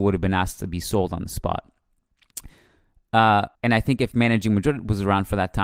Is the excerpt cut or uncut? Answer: cut